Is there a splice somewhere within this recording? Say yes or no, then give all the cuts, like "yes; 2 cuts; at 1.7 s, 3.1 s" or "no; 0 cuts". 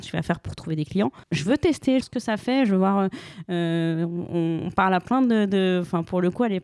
yes; 2 cuts; at 1.2 s, 2.0 s